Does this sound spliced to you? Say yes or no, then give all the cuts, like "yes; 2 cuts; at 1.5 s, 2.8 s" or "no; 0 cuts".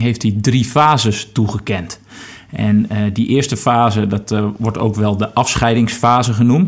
no; 0 cuts